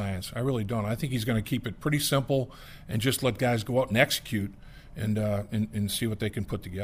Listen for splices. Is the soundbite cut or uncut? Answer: uncut